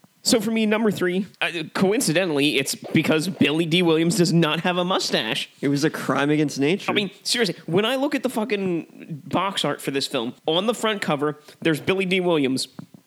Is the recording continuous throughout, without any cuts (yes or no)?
no